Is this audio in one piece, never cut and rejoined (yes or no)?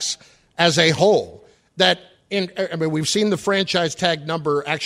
yes